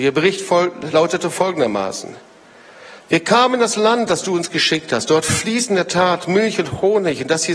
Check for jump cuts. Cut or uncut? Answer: uncut